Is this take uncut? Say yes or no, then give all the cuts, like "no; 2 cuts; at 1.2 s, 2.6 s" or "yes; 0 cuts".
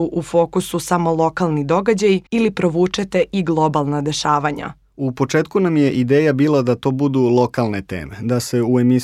no; 1 cut; at 2.3 s